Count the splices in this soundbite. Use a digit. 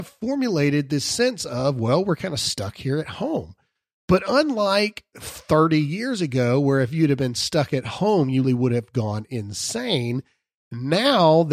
1